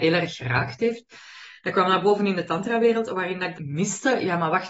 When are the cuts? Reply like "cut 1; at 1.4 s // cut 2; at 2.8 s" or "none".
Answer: cut 1; at 3.5 s